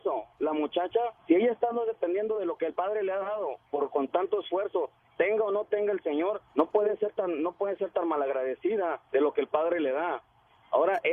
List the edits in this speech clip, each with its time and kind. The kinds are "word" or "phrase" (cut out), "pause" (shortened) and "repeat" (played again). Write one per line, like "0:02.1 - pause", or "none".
0:01.2 - pause
0:06.5 - pause
0:09.1 - pause